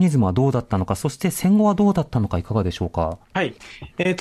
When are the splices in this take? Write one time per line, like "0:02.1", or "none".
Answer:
0:03.2